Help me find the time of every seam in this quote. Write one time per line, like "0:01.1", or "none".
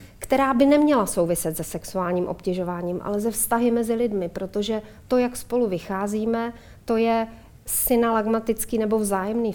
none